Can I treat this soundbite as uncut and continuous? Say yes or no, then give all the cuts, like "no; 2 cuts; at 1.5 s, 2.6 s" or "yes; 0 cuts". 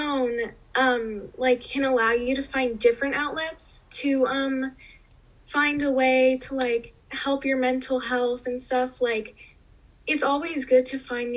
no; 1 cut; at 7.0 s